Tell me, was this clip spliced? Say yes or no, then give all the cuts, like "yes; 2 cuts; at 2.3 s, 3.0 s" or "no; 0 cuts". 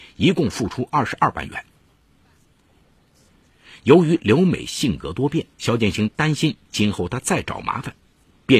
yes; 1 cut; at 5.5 s